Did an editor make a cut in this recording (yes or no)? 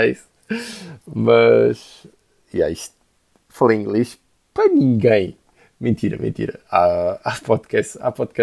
no